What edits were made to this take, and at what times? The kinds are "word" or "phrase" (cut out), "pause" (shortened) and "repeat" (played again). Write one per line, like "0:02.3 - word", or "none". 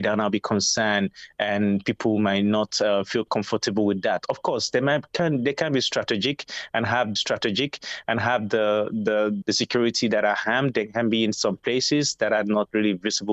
0:07.2 - repeat
0:09.4 - word